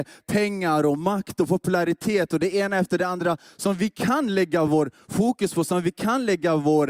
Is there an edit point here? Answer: no; 0 cuts

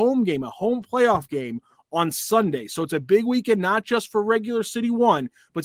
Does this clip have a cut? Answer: no; 0 cuts

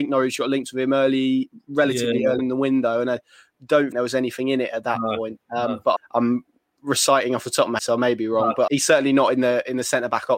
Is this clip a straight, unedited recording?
no; 5 cuts; at 2.4 s, 3.9 s, 6.0 s, 7.8 s, 8.7 s

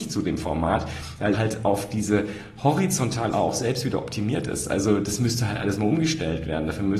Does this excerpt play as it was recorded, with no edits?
no; 2 cuts; at 1.3 s, 3.3 s

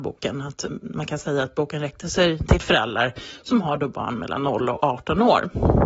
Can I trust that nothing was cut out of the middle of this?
yes; 0 cuts

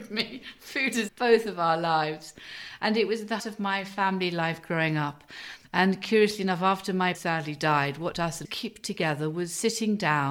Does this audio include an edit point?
yes; 5 cuts; at 1.1 s, 3.4 s, 7.1 s, 8.1 s, 8.4 s

